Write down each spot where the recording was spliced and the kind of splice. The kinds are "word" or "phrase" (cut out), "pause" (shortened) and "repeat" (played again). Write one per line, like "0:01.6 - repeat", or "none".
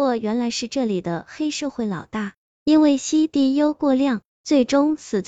0:02.5 - phrase